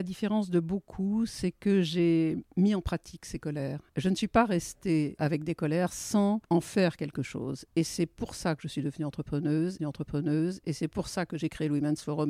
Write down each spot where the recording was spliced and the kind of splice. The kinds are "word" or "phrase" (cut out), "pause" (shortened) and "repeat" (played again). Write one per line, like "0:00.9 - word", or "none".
0:03.9 - pause
0:05.2 - word
0:06.4 - pause
0:09.8 - repeat

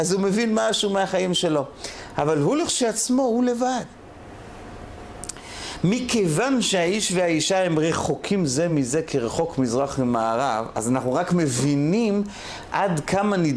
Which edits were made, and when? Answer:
none

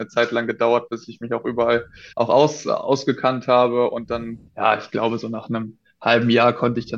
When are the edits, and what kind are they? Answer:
0:02.1 - pause
0:04.5 - pause

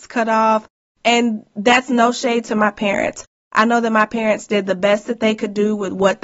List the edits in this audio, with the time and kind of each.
none

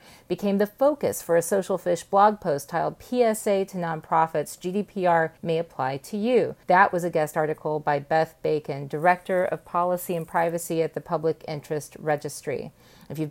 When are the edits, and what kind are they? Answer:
0:05.4 - pause
0:06.6 - pause

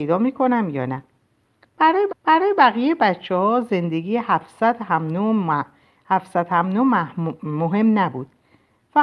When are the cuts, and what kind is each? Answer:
0:02.1 - repeat

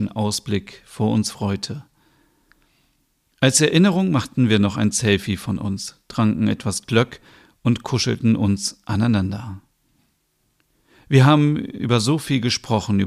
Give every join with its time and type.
none

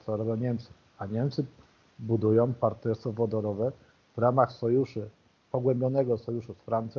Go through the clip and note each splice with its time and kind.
none

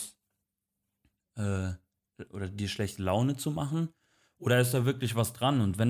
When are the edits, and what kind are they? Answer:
none

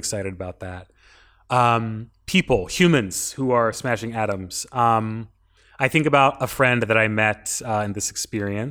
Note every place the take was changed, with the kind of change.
none

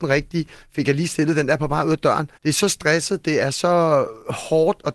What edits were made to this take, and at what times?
0:02.4 - pause

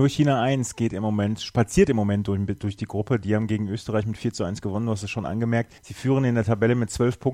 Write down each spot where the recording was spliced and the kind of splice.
0:05.8 - pause

